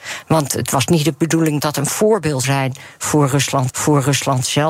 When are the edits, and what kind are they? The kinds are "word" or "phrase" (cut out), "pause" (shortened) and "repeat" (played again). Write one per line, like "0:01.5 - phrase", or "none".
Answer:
0:01.6 - word
0:02.4 - word
0:03.7 - repeat